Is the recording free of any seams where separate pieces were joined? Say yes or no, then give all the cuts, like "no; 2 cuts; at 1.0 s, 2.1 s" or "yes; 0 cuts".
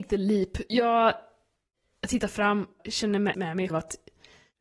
no; 3 cuts; at 2.8 s, 3.3 s, 3.7 s